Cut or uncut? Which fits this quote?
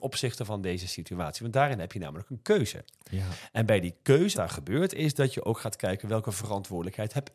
cut